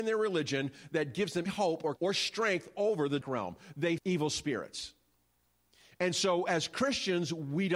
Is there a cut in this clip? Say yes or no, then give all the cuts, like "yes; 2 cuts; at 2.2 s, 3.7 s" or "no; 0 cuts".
yes; 4 cuts; at 1.5 s, 2.0 s, 3.2 s, 4.0 s